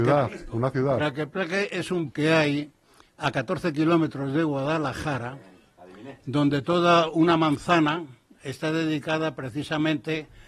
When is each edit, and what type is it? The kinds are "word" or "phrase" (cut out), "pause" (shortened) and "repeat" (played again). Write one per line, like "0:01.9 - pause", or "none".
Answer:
0:02.1 - word
0:06.2 - word